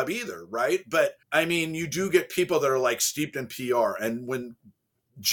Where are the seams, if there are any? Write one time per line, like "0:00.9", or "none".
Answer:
0:01.2